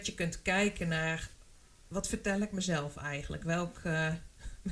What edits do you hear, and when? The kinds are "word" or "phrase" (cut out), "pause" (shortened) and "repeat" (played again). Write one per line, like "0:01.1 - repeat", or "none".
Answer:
none

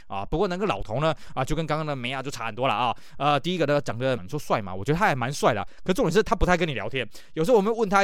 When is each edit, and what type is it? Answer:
0:04.2 - word

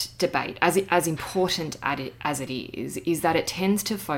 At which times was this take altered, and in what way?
none

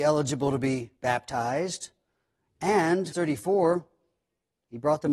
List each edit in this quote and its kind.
0:01.0 - pause
0:03.1 - word

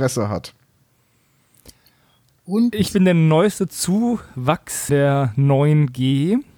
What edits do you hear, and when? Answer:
0:04.9 - word

